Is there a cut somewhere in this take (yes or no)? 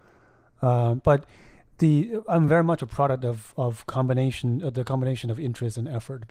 no